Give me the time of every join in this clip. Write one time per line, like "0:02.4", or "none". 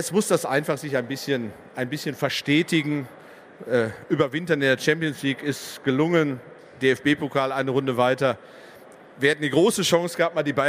none